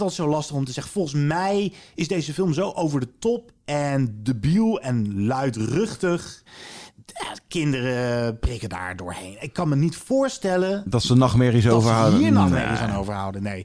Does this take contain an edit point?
no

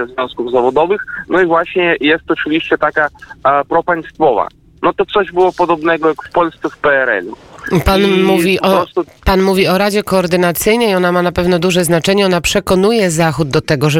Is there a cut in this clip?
no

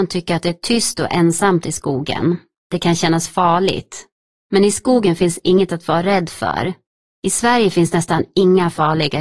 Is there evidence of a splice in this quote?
no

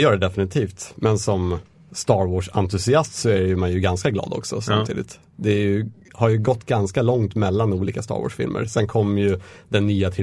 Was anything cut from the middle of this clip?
no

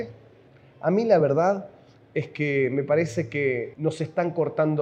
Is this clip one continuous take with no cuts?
yes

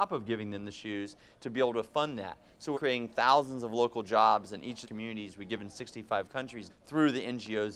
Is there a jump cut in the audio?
yes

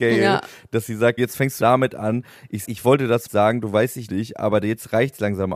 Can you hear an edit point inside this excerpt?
yes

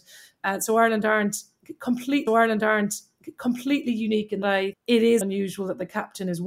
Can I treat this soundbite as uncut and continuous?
no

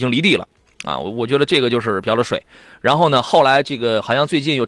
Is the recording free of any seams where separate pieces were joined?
yes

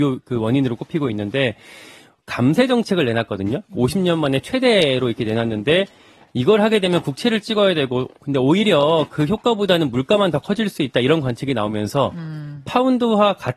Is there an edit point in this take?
no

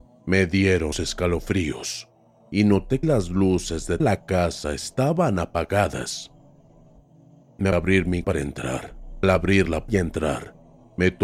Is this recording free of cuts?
no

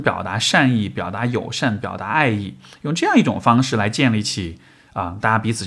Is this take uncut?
yes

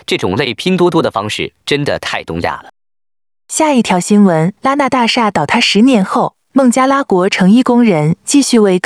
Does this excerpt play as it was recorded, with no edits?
no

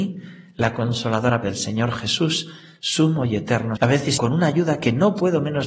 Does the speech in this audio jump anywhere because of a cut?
yes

